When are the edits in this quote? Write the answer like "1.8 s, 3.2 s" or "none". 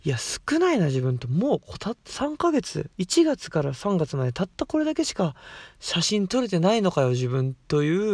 2.9 s